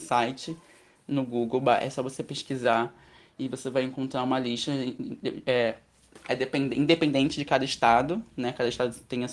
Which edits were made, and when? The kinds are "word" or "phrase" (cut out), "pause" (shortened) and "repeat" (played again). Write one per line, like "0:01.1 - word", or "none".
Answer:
none